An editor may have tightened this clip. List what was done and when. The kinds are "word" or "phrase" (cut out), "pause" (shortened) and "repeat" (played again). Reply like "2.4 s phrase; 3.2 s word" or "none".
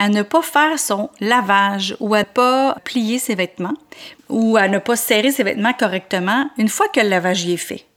2.2 s word; 4.2 s pause